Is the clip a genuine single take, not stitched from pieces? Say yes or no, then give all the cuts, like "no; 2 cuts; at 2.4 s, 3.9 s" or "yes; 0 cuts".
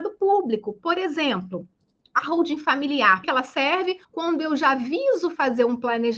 no; 2 cuts; at 3.2 s, 4.0 s